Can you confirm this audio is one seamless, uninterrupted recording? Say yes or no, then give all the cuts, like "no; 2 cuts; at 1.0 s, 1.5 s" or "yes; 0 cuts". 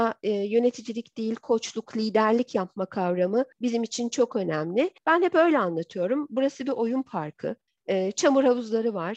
no; 3 cuts; at 3.5 s, 5.0 s, 7.7 s